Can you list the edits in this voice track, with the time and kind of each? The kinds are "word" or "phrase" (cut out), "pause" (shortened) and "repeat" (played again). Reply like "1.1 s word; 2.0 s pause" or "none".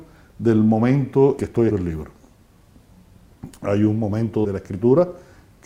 1.4 s word; 1.7 s word; 4.4 s word